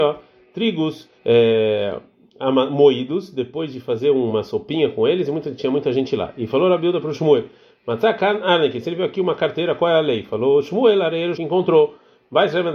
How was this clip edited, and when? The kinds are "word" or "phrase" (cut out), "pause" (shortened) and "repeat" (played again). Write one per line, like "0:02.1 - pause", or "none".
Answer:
0:01.2 - pause
0:11.4 - phrase